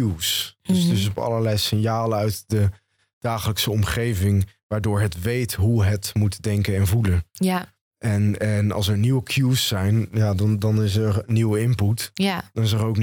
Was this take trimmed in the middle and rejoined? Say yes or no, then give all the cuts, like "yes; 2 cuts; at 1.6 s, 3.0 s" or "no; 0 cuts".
no; 0 cuts